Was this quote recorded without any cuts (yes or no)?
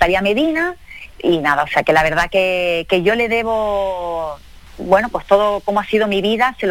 no